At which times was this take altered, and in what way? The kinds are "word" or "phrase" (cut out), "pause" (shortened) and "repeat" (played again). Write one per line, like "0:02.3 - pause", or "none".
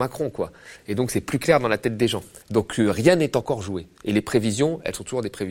0:02.4 - pause